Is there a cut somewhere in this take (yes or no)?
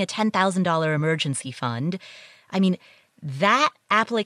no